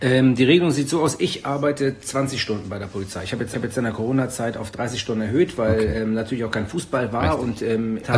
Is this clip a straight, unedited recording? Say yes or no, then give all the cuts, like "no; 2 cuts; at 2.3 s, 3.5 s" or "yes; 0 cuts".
no; 1 cut; at 3.5 s